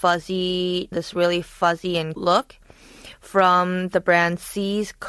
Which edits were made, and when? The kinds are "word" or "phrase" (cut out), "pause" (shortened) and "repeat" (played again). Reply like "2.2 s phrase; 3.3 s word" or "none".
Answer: 0.9 s phrase; 2.2 s word